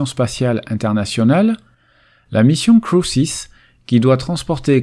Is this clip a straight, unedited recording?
yes; 0 cuts

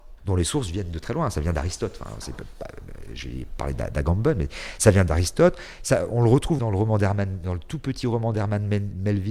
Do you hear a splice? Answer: yes; 1 cut; at 6.6 s

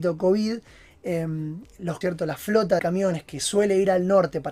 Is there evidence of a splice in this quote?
yes; 2 cuts; at 2.0 s, 2.8 s

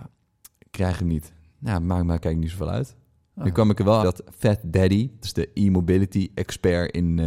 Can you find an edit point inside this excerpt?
yes; 2 cuts; at 4.0 s, 5.2 s

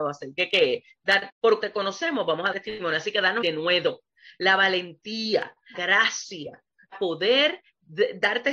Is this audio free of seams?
no; 6 cuts; at 1.3 s, 1.6 s, 2.5 s, 3.4 s, 5.7 s, 6.9 s

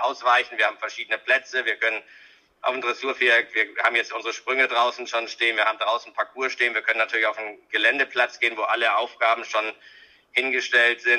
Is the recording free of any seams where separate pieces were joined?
yes; 0 cuts

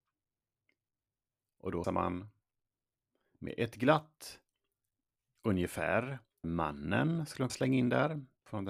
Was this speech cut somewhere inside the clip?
yes; 3 cuts; at 1.8 s, 6.4 s, 7.5 s

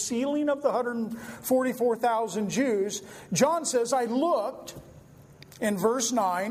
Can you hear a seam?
no; 0 cuts

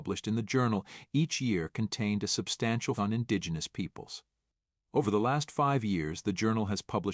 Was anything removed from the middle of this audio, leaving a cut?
yes; 1 cut; at 3.0 s

